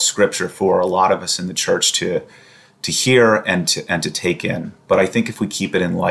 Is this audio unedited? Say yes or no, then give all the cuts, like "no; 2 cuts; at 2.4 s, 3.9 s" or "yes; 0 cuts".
yes; 0 cuts